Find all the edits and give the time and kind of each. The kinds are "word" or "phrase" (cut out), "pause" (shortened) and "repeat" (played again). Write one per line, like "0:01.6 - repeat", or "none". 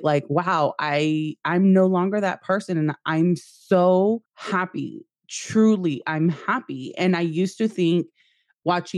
0:04.2 - pause